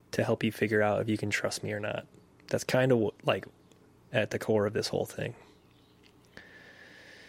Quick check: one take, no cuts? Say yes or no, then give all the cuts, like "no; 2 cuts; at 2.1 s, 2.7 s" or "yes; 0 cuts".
yes; 0 cuts